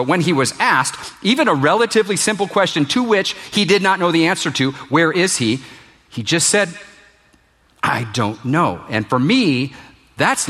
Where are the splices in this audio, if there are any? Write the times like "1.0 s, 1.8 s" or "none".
none